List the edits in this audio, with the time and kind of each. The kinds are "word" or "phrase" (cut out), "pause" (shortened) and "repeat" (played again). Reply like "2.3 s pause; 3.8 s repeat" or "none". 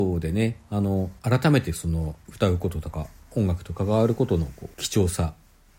1.2 s pause; 2.2 s pause; 4.7 s pause